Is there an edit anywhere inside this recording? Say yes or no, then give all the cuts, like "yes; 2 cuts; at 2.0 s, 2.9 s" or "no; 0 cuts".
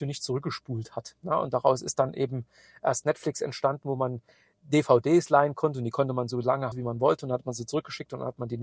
yes; 1 cut; at 6.7 s